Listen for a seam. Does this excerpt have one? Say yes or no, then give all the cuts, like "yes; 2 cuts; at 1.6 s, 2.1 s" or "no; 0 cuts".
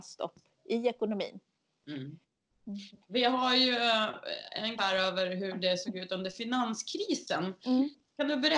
yes; 2 cuts; at 3.0 s, 4.8 s